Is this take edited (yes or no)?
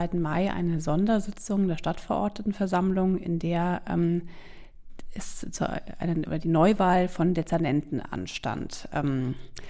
no